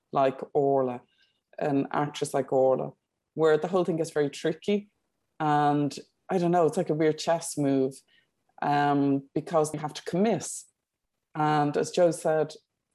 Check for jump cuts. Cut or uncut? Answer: cut